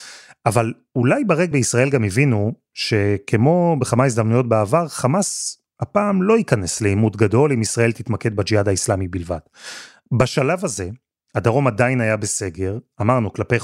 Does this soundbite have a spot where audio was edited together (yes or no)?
yes